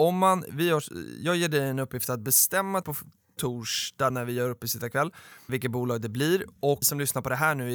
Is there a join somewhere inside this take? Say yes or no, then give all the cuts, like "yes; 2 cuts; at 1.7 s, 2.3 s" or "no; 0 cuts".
yes; 4 cuts; at 2.8 s, 4.1 s, 5.5 s, 6.8 s